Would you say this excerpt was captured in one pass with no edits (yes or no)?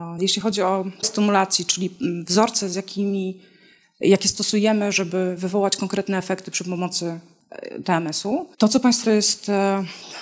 no